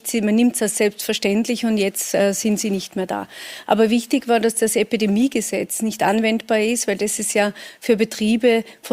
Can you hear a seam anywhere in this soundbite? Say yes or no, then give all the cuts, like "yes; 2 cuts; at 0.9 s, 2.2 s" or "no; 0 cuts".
no; 0 cuts